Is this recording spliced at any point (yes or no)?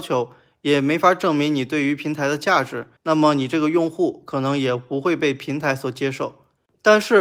yes